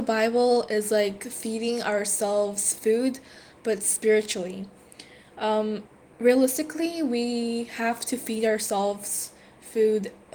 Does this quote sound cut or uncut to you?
uncut